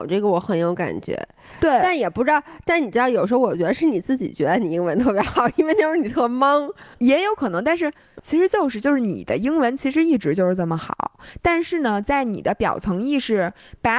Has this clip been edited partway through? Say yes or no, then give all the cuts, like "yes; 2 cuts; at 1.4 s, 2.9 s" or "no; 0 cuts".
yes; 2 cuts; at 6.9 s, 8.2 s